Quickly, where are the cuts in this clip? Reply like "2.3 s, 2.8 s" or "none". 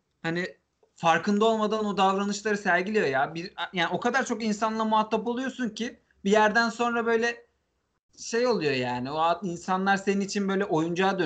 none